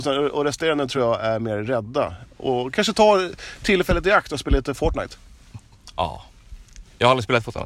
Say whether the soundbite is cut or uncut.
uncut